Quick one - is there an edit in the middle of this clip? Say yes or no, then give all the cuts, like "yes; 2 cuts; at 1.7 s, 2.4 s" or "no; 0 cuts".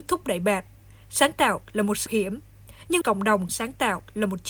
yes; 3 cuts; at 2.1 s, 3.0 s, 3.5 s